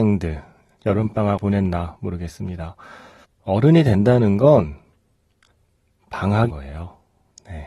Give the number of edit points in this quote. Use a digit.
3